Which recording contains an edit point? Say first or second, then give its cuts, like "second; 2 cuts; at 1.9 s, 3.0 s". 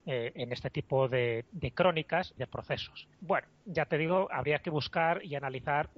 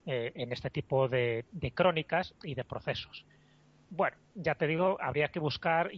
first; 2 cuts; at 2.4 s, 3.1 s